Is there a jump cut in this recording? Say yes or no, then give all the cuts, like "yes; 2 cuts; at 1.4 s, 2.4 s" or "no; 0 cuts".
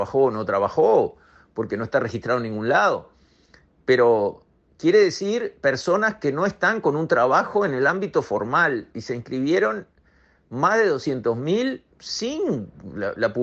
yes; 1 cut; at 11.9 s